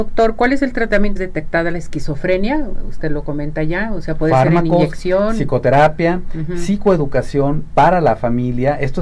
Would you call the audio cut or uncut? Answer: cut